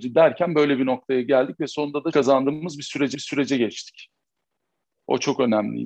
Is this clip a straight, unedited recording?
no; 2 cuts; at 2.1 s, 3.1 s

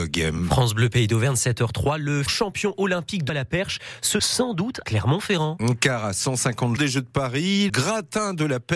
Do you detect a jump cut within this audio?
yes; 6 cuts; at 2.3 s, 3.3 s, 4.2 s, 4.8 s, 6.8 s, 7.7 s

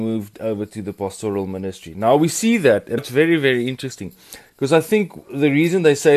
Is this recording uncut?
no; 1 cut; at 3.0 s

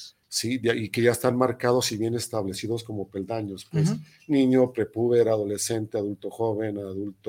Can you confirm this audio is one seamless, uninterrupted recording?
yes; 0 cuts

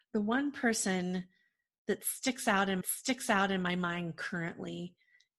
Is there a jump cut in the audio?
yes; 1 cut; at 2.8 s

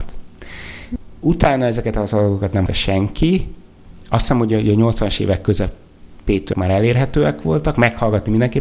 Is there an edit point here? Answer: yes; 2 cuts; at 2.7 s, 6.5 s

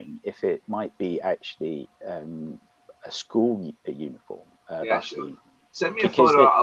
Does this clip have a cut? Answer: no; 0 cuts

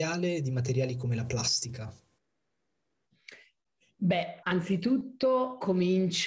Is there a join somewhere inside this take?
yes; 1 cut; at 4.4 s

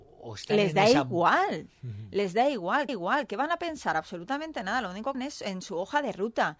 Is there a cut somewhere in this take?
yes; 2 cuts; at 2.9 s, 5.1 s

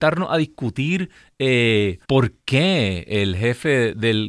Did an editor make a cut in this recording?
yes; 1 cut; at 2.0 s

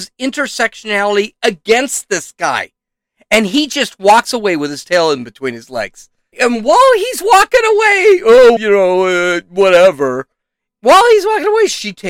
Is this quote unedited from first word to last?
no; 2 cuts; at 6.3 s, 8.6 s

